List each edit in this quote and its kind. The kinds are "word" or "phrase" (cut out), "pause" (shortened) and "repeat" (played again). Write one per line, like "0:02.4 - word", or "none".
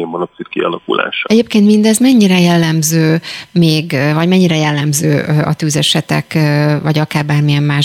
none